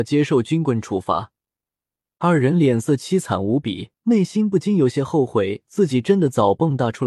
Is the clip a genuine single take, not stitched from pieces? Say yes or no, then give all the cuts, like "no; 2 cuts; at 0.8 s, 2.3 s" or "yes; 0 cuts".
no; 1 cut; at 3.9 s